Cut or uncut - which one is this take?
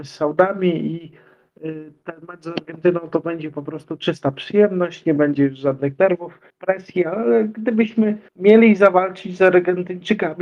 cut